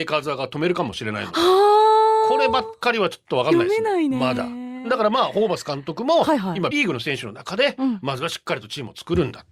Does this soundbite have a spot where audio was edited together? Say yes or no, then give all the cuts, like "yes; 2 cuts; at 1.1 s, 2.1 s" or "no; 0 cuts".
yes; 1 cut; at 6.7 s